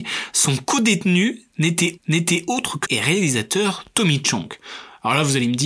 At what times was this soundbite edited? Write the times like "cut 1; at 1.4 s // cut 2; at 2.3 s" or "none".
cut 1; at 2.0 s // cut 2; at 2.8 s

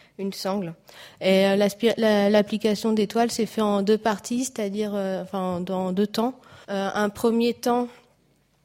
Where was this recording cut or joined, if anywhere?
cut 1; at 6.6 s

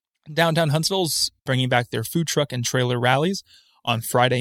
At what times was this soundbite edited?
none

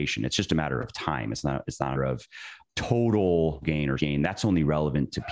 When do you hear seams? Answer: cut 1; at 2.0 s // cut 2; at 2.6 s // cut 3; at 3.6 s // cut 4; at 4.0 s

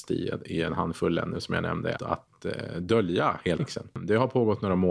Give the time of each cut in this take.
cut 1; at 2.0 s // cut 2; at 3.6 s

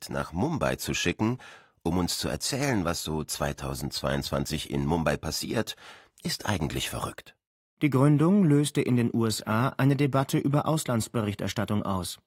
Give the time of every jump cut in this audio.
none

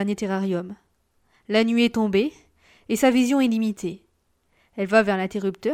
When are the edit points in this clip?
none

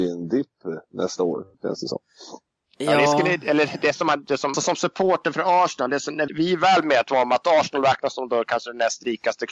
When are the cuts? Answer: cut 1; at 1.5 s // cut 2; at 4.5 s // cut 3; at 6.3 s

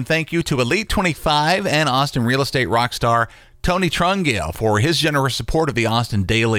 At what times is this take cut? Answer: none

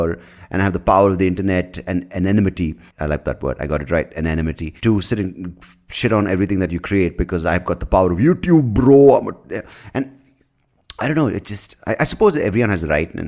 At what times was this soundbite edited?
cut 1; at 2.9 s // cut 2; at 4.8 s

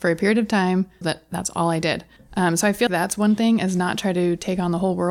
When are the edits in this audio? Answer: cut 1; at 1.0 s // cut 2; at 2.2 s // cut 3; at 2.9 s

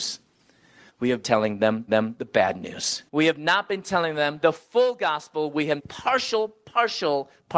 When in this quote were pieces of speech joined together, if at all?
cut 1; at 1.2 s // cut 2; at 1.9 s // cut 3; at 3.1 s // cut 4; at 5.8 s

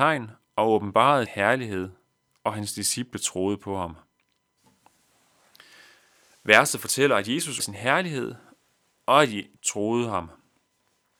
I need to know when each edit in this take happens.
cut 1; at 1.3 s // cut 2; at 7.6 s // cut 3; at 9.6 s

